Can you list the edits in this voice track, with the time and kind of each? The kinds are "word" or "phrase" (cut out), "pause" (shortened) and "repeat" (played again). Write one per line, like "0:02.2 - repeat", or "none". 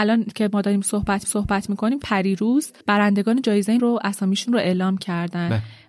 0:01.2 - repeat
0:02.0 - word
0:02.8 - pause
0:03.8 - word